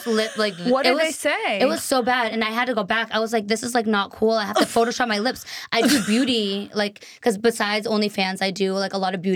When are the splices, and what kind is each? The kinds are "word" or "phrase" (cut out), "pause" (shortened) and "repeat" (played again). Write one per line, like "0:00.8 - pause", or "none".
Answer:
none